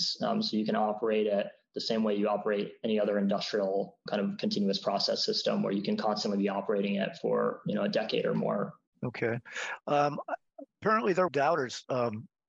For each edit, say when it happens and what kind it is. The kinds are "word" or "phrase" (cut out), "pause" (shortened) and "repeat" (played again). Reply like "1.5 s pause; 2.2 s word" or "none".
4.1 s word; 7.6 s word; 8.9 s pause; 10.7 s pause; 11.3 s phrase